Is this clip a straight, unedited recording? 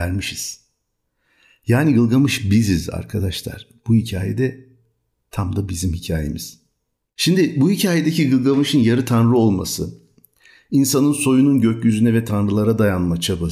yes; 0 cuts

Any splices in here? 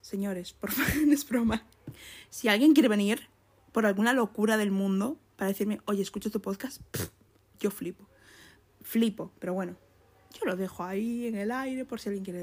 no; 0 cuts

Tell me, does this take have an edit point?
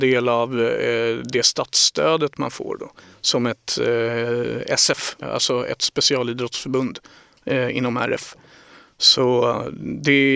yes; 1 cut; at 5.2 s

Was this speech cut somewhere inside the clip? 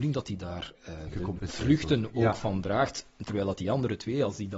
no; 0 cuts

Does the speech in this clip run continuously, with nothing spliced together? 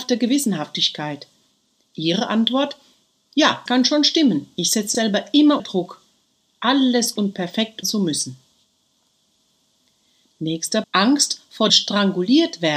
no; 7 cuts; at 3.7 s, 4.9 s, 5.6 s, 7.2 s, 7.8 s, 10.8 s, 11.7 s

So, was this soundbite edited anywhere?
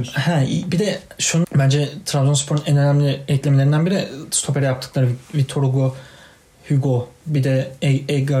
yes; 1 cut; at 1.4 s

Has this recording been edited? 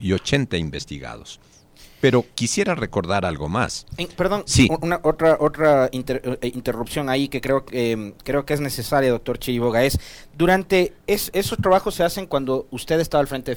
yes; 1 cut; at 11.0 s

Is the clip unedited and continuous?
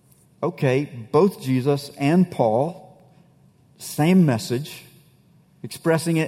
yes; 0 cuts

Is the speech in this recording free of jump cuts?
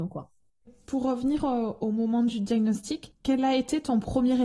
yes; 0 cuts

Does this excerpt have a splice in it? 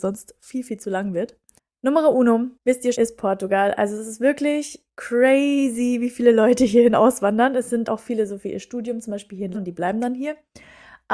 yes; 5 cuts; at 1.6 s, 2.5 s, 2.9 s, 7.9 s, 9.5 s

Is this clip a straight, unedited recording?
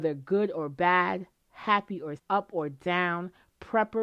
no; 1 cut; at 2.2 s

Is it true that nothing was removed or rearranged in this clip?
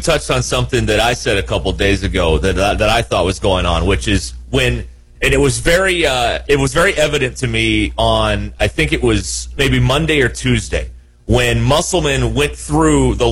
yes; 0 cuts

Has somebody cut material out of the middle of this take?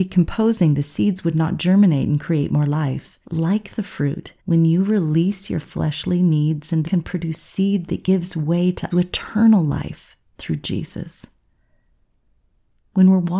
yes; 4 cuts; at 3.2 s, 4.4 s, 6.8 s, 8.9 s

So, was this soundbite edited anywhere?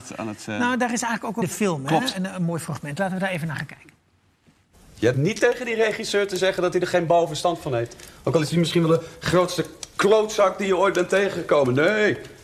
yes; 2 cuts; at 1.4 s, 5.1 s

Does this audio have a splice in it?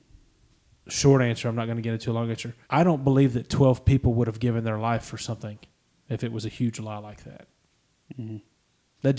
yes; 1 cut; at 2.6 s

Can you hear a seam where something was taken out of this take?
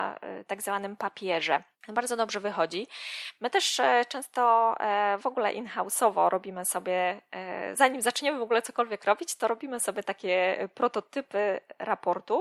yes; 1 cut; at 1.7 s

